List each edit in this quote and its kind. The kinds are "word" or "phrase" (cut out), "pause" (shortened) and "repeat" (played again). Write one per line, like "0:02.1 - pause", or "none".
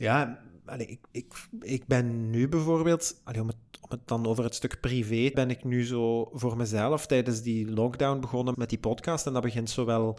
0:01.1 - pause
0:03.3 - word
0:05.3 - word
0:08.5 - word